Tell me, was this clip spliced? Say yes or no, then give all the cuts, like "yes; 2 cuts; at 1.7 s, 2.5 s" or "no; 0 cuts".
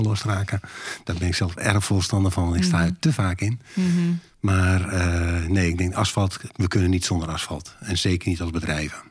no; 0 cuts